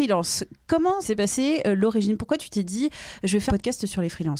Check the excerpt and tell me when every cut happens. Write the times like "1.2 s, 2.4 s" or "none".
1.0 s, 3.5 s